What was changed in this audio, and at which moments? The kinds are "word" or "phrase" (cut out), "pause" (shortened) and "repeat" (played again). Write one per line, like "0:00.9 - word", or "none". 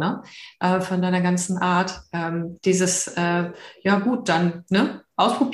none